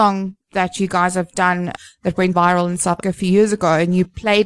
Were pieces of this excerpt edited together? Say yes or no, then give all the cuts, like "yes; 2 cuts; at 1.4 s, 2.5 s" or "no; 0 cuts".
yes; 2 cuts; at 2.3 s, 3.0 s